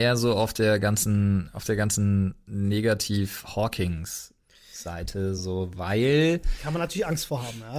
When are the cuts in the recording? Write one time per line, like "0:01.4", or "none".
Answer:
none